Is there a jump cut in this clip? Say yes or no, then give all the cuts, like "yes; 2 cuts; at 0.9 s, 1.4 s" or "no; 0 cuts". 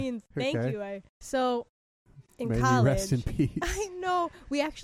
yes; 1 cut; at 1.1 s